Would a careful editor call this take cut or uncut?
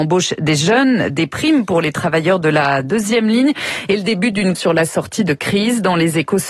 cut